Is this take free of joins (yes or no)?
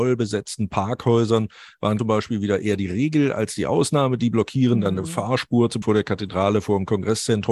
no